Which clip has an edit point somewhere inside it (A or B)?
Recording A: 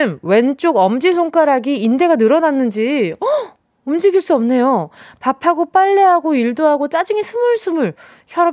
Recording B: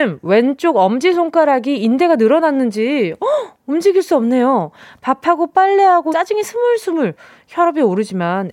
B